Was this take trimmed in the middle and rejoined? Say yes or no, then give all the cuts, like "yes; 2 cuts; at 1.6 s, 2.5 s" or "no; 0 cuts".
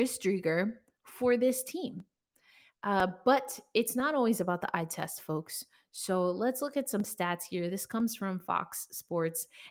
no; 0 cuts